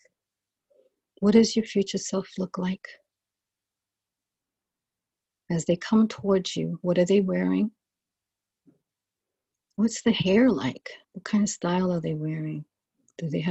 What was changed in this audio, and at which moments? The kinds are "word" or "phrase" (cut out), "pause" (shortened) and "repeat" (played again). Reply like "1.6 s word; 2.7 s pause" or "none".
11.0 s pause